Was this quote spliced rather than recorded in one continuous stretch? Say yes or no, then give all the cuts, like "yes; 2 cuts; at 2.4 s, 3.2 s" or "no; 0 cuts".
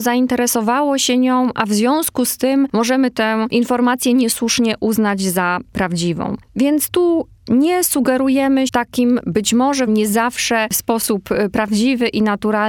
yes; 2 cuts; at 8.7 s, 9.9 s